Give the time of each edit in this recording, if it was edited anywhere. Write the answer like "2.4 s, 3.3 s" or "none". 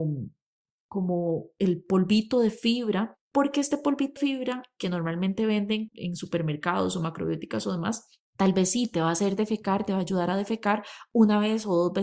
3.2 s, 4.2 s, 5.9 s, 8.3 s